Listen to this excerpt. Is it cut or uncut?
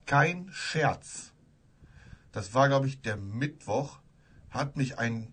uncut